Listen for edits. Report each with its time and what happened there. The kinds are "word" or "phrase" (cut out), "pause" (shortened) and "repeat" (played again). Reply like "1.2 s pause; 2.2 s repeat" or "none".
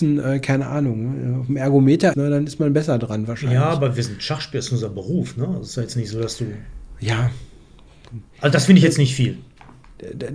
2.1 s word